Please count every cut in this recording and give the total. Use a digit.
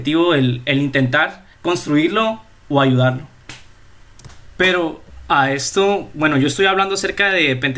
1